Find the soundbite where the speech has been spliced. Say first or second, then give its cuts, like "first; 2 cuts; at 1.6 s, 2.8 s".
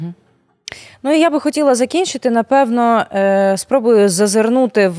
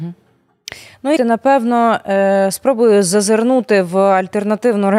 second; 1 cut; at 1.2 s